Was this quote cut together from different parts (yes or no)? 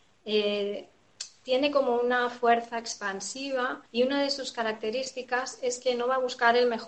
yes